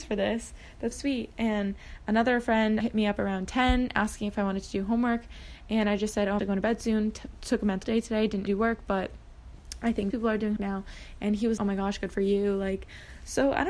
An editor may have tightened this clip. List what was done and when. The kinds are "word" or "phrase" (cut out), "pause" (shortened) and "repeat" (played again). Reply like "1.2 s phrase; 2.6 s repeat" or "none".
0.9 s word; 2.8 s word; 6.4 s word; 7.8 s word; 8.5 s word; 10.1 s word; 10.6 s word; 11.6 s word